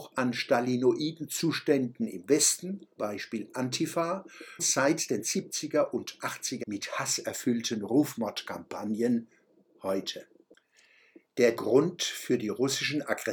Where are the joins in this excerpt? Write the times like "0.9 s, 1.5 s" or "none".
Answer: 3.0 s, 4.6 s, 6.6 s, 9.7 s, 11.6 s